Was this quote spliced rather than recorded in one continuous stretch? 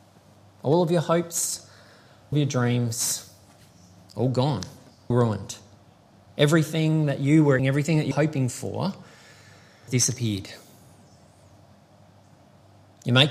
yes; 5 cuts; at 2.3 s, 5.1 s, 7.6 s, 8.1 s, 9.9 s

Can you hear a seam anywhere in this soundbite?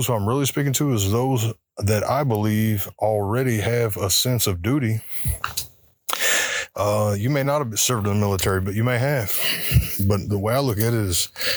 no; 0 cuts

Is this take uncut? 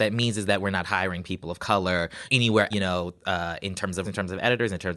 no; 2 cuts; at 2.7 s, 4.0 s

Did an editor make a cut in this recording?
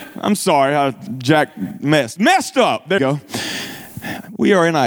yes; 2 cuts; at 1.1 s, 3.0 s

